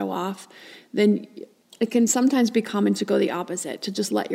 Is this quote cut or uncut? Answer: uncut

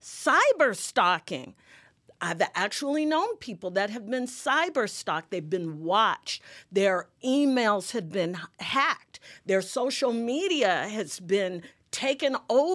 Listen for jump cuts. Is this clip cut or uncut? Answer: uncut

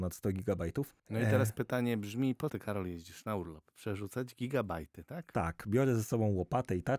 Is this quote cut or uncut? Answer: cut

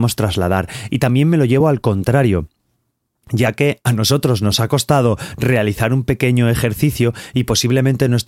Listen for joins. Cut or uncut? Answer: uncut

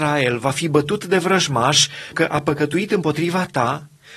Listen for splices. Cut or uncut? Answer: cut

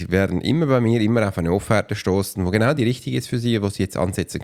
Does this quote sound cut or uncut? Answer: uncut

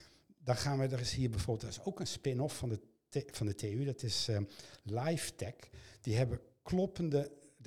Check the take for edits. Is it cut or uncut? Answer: uncut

